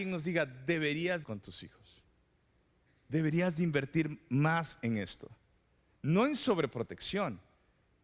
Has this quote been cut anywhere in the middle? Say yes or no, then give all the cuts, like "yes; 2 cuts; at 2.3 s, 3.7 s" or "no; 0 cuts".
yes; 1 cut; at 1.2 s